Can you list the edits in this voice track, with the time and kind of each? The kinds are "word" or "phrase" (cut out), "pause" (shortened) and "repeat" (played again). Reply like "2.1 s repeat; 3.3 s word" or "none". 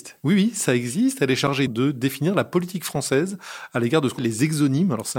1.7 s word; 4.2 s word